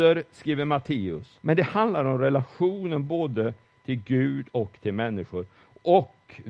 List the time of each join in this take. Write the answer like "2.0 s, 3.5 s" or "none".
1.4 s